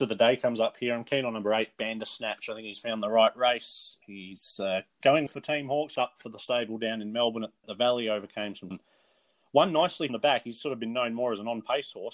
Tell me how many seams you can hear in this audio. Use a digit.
6